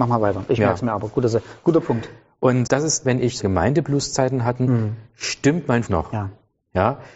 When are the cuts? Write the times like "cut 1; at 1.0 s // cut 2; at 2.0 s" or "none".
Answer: cut 1; at 2.7 s // cut 2; at 3.0 s // cut 3; at 3.4 s // cut 4; at 5.9 s